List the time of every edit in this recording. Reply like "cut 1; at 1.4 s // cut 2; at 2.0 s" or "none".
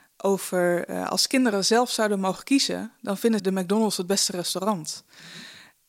cut 1; at 3.4 s